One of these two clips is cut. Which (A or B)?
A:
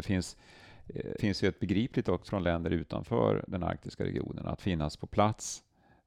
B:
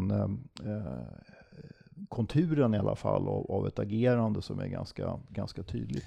A